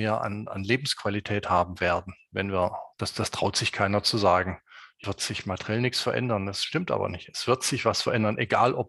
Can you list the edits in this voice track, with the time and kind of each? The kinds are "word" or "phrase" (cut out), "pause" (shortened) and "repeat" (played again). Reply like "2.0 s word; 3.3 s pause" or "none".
2.9 s pause; 5.0 s word